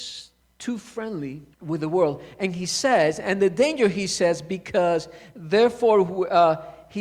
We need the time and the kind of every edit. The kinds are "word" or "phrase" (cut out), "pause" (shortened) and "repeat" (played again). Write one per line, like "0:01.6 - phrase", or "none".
0:01.5 - pause